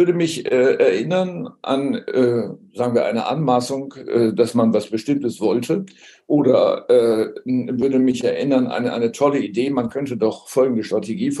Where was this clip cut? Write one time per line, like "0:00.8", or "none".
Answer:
none